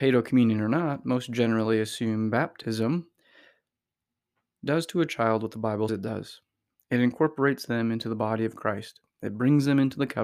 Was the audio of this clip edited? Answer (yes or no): yes